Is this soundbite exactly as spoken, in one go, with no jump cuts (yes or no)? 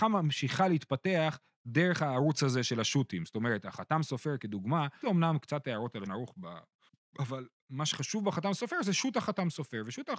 no